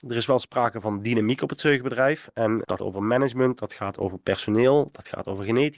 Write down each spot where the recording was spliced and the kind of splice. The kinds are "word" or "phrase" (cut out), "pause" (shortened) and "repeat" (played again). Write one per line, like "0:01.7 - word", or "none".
0:02.8 - word